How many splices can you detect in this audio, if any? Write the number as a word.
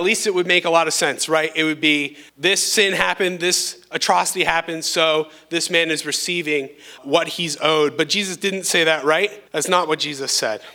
three